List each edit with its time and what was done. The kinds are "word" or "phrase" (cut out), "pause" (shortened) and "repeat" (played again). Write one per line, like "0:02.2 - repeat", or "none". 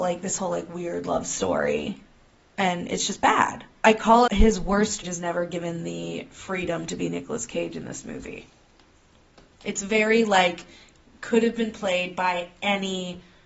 0:03.8 - pause
0:04.3 - word
0:05.0 - phrase